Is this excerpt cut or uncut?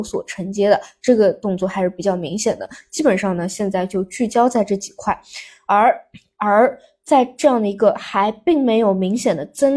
uncut